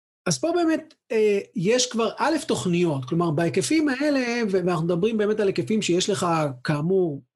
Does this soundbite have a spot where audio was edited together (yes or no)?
no